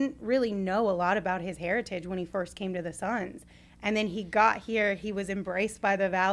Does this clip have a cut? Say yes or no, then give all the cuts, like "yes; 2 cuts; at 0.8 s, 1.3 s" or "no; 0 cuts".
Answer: no; 0 cuts